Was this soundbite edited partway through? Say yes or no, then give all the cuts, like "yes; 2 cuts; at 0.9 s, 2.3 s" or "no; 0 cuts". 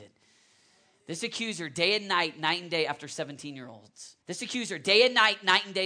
yes; 1 cut; at 4.2 s